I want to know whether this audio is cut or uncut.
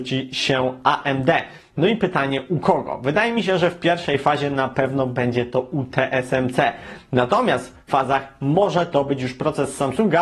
cut